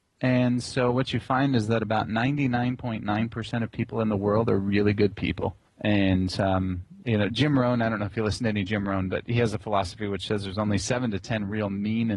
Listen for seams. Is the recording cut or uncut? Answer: cut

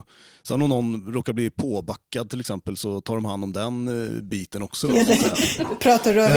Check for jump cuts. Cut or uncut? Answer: uncut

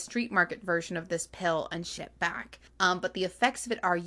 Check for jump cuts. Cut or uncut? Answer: cut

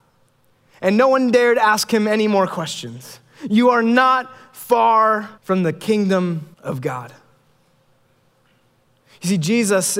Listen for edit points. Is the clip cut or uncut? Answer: cut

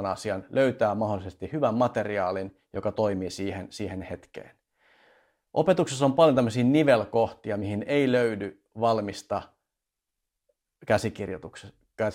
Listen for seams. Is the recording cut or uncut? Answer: uncut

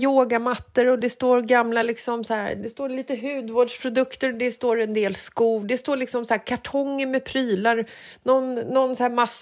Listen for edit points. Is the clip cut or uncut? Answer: uncut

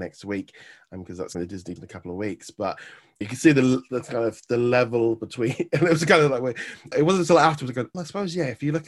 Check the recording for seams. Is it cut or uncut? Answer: cut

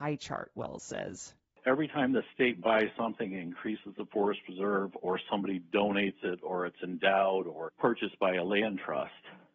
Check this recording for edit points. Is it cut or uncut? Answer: cut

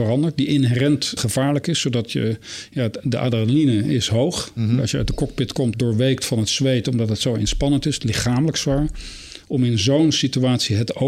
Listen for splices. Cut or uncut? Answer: cut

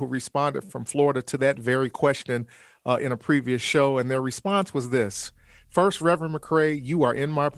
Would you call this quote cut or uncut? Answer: uncut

